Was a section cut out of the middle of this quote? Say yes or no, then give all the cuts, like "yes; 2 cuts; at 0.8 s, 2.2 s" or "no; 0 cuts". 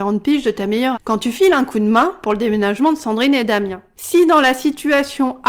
yes; 1 cut; at 0.9 s